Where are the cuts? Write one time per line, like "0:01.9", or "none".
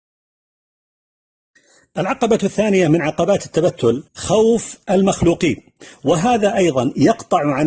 0:04.1